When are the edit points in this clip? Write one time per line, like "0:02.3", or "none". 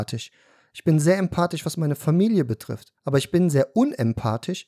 0:03.0